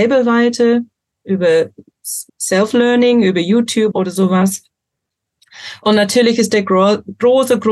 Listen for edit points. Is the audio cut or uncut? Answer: cut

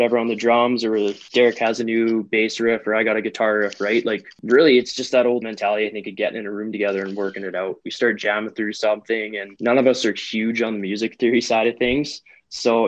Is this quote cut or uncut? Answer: cut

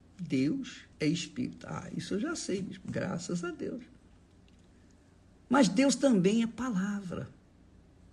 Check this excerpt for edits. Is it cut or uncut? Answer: cut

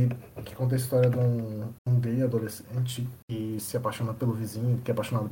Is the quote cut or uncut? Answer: cut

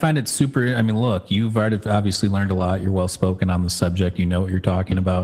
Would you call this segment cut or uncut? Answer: uncut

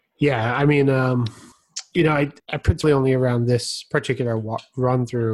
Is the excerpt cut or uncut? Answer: cut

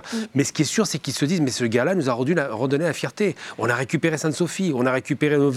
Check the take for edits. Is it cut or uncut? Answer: uncut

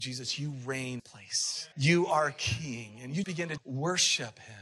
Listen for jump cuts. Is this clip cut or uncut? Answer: cut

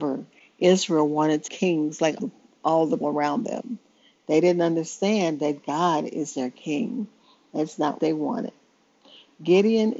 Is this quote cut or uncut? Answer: cut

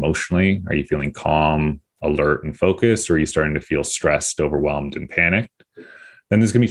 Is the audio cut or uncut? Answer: uncut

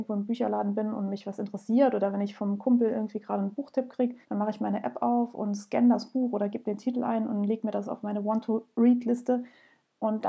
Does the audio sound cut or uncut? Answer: cut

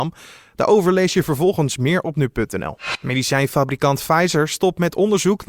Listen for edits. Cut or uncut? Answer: uncut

